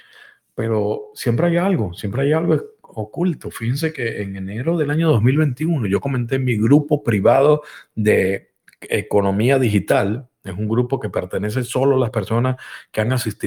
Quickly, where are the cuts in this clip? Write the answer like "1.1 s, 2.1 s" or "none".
none